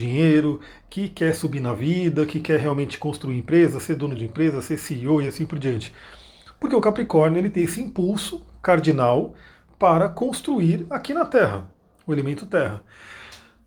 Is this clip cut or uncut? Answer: uncut